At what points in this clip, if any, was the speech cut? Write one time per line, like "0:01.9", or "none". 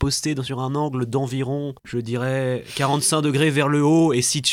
0:01.8